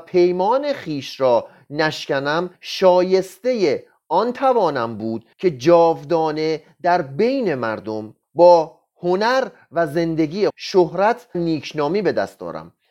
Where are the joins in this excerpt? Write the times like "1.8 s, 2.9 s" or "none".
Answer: 2.5 s, 5.3 s, 8.2 s, 10.5 s, 11.3 s